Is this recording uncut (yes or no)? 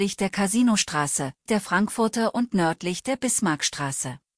no